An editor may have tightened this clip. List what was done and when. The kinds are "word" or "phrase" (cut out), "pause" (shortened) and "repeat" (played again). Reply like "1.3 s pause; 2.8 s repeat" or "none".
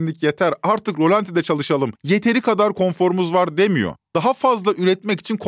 2.0 s pause; 4.0 s pause